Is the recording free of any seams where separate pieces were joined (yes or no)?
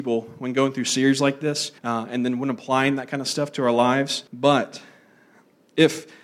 no